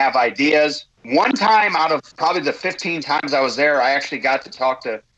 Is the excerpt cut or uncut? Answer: cut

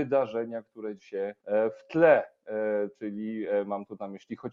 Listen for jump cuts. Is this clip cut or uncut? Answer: cut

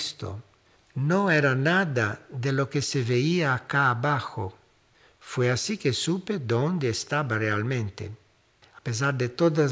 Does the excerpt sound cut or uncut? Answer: uncut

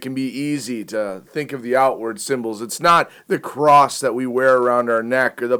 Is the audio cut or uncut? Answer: uncut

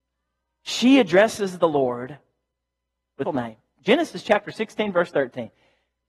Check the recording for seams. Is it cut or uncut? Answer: cut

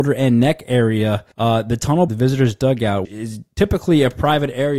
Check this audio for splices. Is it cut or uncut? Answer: cut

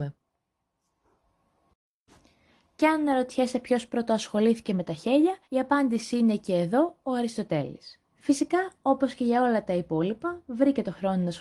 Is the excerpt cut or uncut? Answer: cut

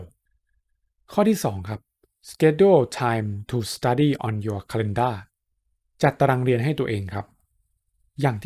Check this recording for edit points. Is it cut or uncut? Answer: uncut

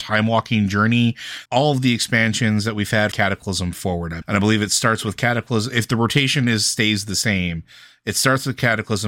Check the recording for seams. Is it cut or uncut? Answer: cut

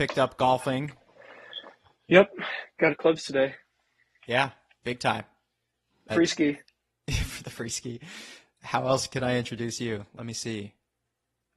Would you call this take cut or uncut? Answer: cut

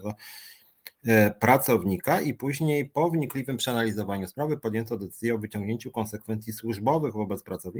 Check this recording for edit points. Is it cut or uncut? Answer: uncut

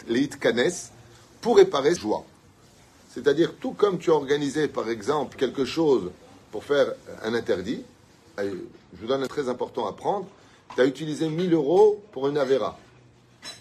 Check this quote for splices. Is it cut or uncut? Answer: cut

